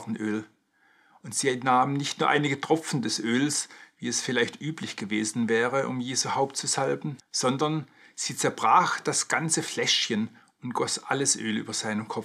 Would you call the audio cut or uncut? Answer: cut